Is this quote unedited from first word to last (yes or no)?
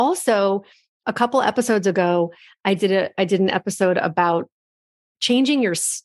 yes